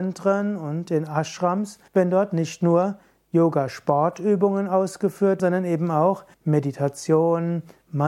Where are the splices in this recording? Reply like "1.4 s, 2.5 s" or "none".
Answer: 1.9 s, 5.4 s, 6.3 s